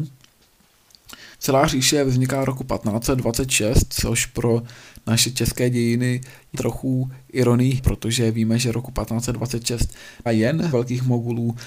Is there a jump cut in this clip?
yes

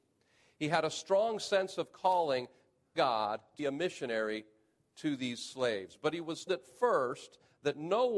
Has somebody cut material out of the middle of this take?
yes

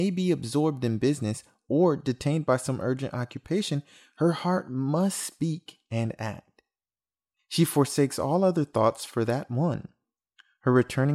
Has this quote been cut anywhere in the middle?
no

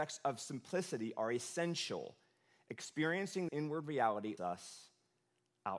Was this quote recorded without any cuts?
no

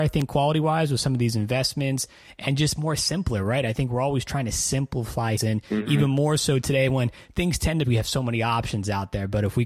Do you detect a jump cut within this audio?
yes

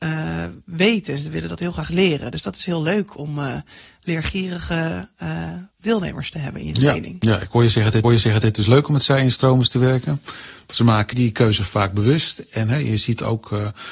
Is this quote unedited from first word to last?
no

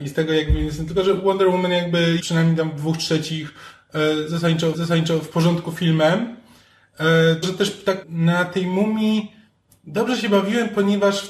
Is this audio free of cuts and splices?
no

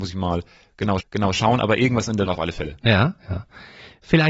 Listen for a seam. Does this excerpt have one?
yes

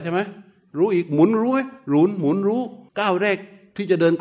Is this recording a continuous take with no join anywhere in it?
no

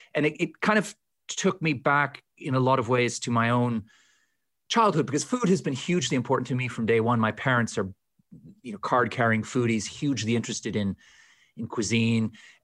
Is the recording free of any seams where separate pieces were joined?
yes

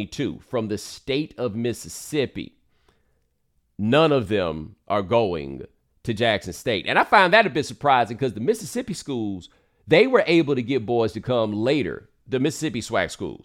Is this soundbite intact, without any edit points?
yes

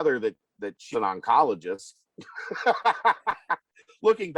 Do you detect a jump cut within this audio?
yes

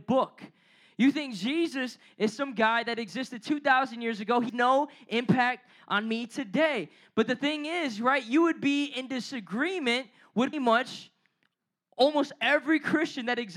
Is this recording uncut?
no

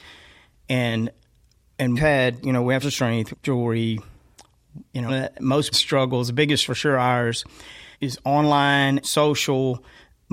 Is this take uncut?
no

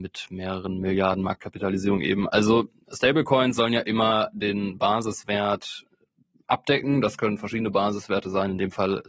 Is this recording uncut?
yes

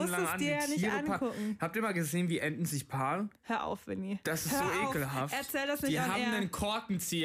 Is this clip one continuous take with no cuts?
no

